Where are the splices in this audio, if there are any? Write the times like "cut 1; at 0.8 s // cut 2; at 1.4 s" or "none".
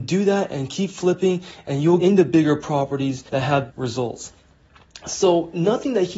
cut 1; at 2.0 s // cut 2; at 3.3 s // cut 3; at 3.7 s